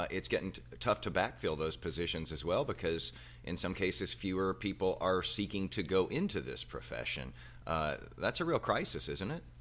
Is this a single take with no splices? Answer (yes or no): yes